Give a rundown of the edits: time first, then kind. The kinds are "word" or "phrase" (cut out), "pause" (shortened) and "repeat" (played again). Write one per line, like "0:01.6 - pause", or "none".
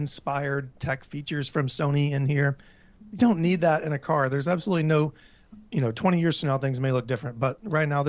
none